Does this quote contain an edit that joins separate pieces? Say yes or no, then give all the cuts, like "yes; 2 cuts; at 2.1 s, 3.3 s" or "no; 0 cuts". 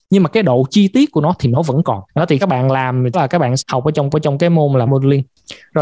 yes; 6 cuts; at 2.1 s, 2.4 s, 3.1 s, 3.6 s, 4.1 s, 4.9 s